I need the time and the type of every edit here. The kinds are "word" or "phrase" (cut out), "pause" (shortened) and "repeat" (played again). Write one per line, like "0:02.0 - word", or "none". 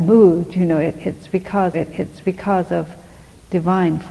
0:01.7 - repeat